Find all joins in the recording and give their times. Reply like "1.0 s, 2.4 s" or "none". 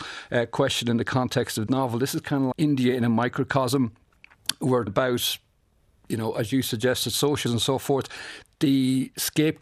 1.7 s, 2.5 s, 4.9 s, 7.5 s